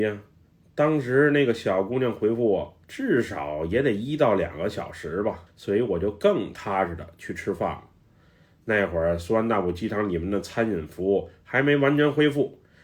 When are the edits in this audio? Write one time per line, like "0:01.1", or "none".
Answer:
0:02.8
0:05.5

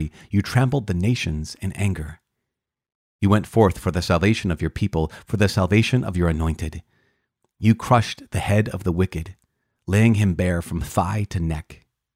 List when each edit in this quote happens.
none

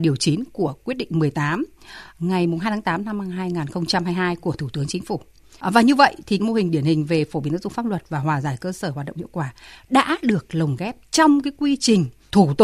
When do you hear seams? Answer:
0:06.4

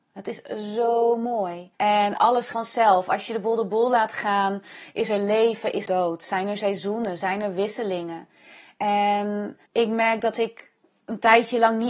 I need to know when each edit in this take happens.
0:01.7
0:02.5
0:05.9
0:09.7
0:10.3

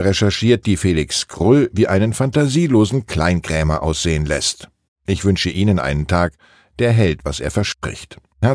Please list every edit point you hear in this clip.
none

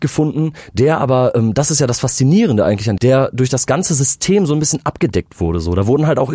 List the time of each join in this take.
0:03.0

